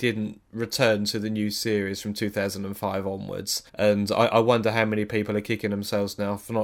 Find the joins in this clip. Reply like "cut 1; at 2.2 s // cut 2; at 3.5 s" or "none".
cut 1; at 3.7 s